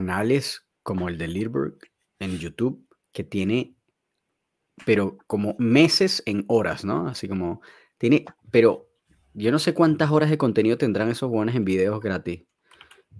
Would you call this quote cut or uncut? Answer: uncut